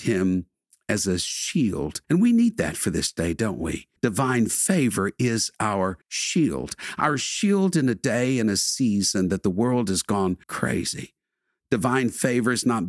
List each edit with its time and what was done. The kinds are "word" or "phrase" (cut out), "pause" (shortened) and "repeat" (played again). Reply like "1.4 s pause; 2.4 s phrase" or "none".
2.0 s pause; 4.0 s pause; 6.0 s pause; 10.4 s pause